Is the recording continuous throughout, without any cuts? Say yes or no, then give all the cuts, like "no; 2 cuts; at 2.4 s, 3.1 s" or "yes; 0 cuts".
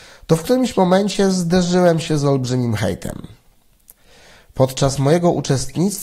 yes; 0 cuts